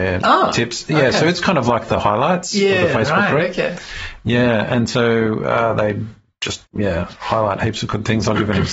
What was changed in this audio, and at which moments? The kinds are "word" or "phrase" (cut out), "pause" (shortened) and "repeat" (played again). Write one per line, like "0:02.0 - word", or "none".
0:06.7 - pause